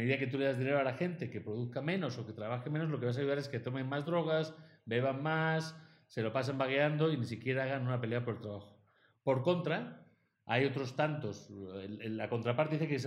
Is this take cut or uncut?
uncut